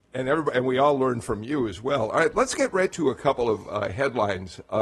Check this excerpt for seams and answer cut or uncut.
uncut